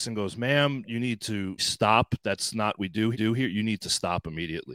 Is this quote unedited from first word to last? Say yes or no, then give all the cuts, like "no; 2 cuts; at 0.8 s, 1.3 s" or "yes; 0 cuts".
no; 3 cuts; at 1.6 s, 2.8 s, 3.1 s